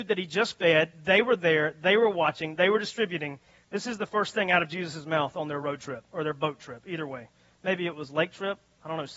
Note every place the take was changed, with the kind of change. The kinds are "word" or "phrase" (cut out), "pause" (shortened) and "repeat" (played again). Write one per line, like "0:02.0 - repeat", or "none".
none

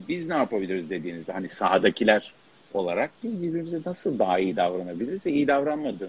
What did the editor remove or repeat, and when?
none

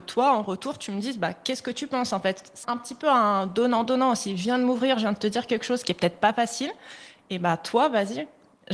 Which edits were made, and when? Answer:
0:02.6 - word

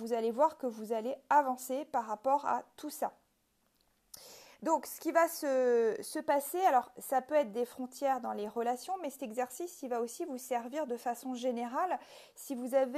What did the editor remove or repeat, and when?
none

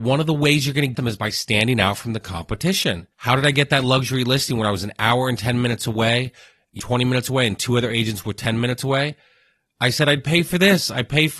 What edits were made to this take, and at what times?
0:00.9 - word
0:03.1 - pause
0:06.8 - phrase

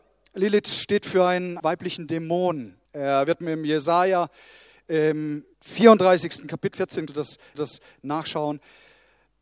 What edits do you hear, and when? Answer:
0:01.6 - word
0:02.9 - pause
0:03.4 - word
0:05.5 - pause
0:06.7 - word
0:07.1 - word
0:07.5 - repeat

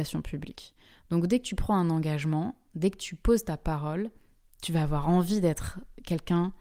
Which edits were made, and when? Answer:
none

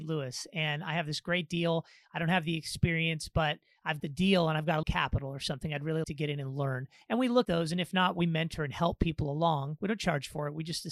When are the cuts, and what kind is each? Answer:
0:04.0 - word
0:04.8 - word
0:06.0 - word
0:07.4 - word

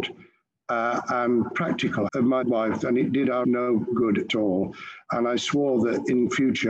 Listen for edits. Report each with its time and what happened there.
0:02.1 - word
0:02.4 - word
0:02.8 - word
0:03.4 - word
0:04.3 - word

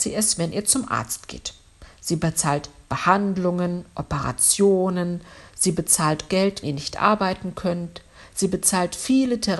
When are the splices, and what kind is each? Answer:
0:06.3 - word
0:06.6 - word

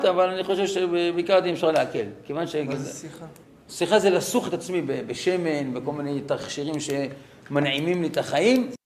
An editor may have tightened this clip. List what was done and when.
0:03.4 - pause

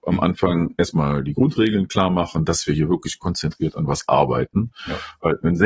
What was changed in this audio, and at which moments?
none

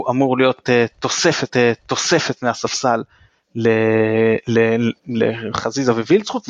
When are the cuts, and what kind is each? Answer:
0:01.5 - repeat

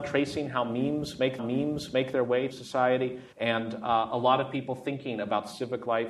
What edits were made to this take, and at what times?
0:01.4 - repeat
0:02.5 - word
0:03.3 - pause

